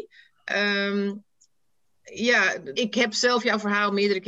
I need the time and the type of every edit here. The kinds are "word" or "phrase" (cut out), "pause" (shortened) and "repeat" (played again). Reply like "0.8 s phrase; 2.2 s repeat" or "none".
2.7 s word